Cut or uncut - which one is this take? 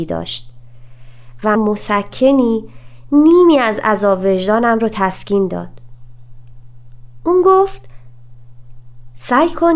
cut